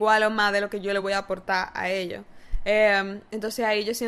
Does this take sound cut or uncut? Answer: uncut